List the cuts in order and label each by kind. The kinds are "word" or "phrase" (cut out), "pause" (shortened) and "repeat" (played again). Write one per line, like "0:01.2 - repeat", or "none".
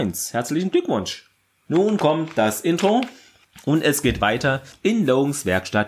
none